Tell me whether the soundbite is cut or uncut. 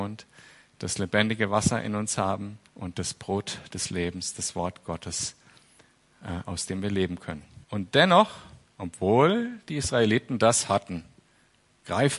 cut